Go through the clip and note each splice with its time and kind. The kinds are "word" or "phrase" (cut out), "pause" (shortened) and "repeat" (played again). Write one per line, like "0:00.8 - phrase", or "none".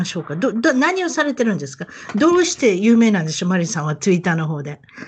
none